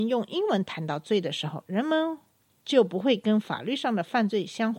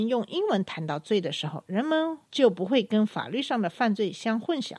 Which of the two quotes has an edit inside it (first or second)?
second